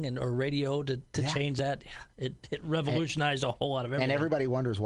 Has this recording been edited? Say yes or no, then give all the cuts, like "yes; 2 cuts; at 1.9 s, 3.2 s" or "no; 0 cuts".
no; 0 cuts